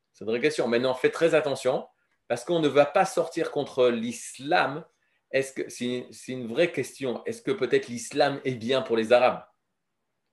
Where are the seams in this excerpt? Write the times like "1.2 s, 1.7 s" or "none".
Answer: none